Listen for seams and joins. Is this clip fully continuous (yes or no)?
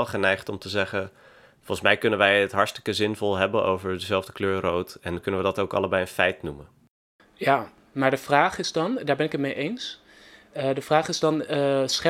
yes